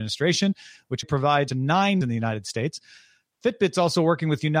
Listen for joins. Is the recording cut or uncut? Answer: cut